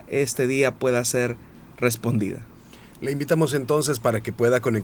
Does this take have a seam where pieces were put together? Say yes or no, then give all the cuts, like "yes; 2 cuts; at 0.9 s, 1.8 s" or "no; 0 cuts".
no; 0 cuts